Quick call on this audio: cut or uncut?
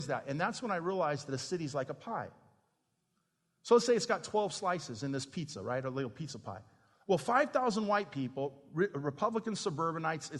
uncut